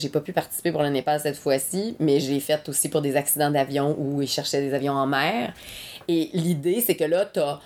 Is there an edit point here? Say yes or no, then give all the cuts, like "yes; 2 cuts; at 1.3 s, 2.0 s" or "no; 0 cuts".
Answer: no; 0 cuts